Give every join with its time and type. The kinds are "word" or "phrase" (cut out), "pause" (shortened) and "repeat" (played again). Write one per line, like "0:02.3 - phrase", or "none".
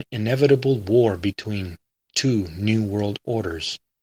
none